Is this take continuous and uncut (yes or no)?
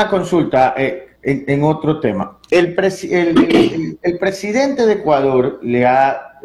no